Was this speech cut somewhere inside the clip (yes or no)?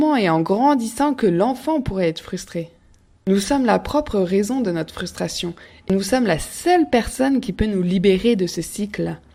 no